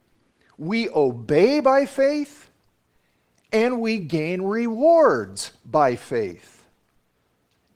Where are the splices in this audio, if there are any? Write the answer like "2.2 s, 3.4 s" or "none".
none